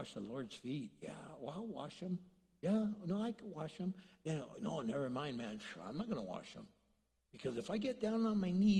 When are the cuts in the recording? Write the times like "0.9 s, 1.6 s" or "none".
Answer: none